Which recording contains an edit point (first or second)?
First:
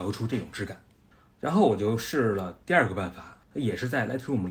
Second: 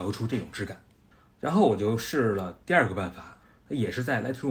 first